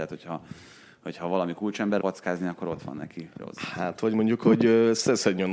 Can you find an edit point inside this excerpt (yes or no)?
yes